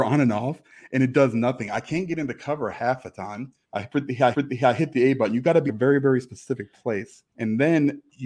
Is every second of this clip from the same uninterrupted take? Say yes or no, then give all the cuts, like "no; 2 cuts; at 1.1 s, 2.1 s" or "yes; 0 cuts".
no; 4 cuts; at 3.6 s, 4.3 s, 5.7 s, 7.3 s